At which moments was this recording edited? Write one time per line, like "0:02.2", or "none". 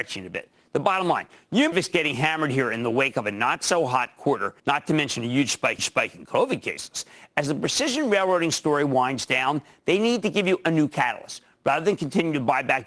0:01.7
0:04.6
0:05.8